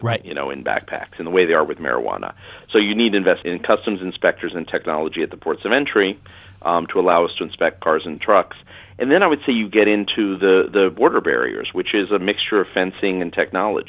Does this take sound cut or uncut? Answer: cut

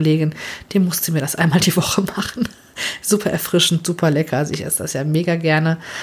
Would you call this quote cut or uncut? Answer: uncut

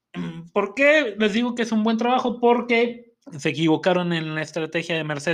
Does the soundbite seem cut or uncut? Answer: cut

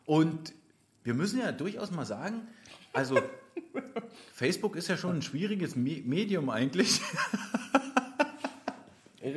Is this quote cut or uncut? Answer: uncut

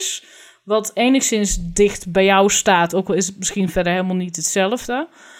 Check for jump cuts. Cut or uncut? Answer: uncut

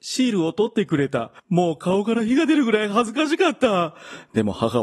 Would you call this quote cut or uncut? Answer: cut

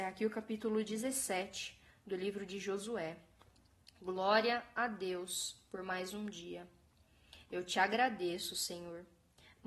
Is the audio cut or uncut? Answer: uncut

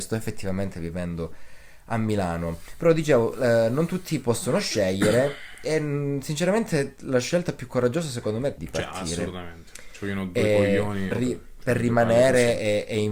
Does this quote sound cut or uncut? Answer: cut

